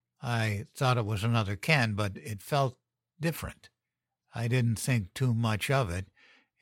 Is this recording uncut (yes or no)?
yes